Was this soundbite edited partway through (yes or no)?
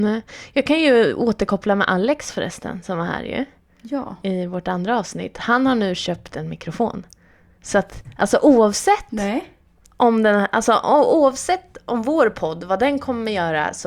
no